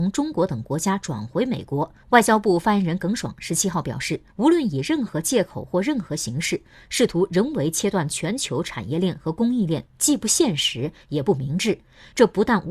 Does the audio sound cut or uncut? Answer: cut